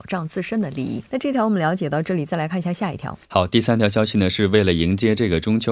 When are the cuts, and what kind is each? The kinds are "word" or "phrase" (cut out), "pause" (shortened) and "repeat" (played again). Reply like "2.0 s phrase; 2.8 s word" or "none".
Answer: 1.1 s pause; 3.2 s pause